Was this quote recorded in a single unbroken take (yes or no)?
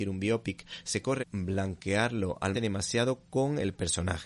no